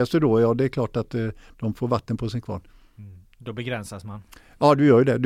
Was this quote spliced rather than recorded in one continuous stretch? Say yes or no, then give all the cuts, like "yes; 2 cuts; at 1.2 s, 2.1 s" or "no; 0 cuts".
no; 0 cuts